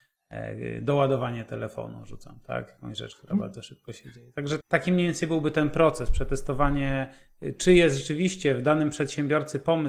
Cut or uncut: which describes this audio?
cut